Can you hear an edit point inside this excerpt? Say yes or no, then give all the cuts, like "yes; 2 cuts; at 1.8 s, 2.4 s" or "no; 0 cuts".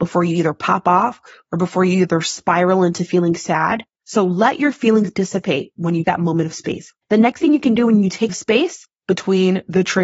yes; 4 cuts; at 3.9 s, 6.0 s, 7.0 s, 8.3 s